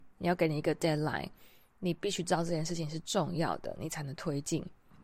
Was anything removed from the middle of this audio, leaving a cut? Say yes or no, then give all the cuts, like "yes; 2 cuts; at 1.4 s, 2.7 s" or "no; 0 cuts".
no; 0 cuts